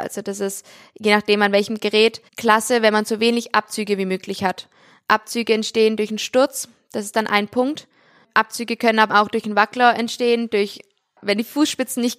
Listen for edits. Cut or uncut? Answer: cut